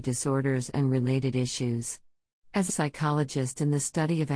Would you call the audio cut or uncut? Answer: cut